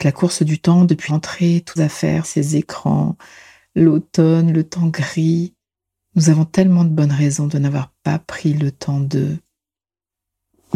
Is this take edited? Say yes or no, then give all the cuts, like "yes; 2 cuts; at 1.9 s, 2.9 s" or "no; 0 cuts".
yes; 4 cuts; at 1.1 s, 1.8 s, 2.2 s, 5.7 s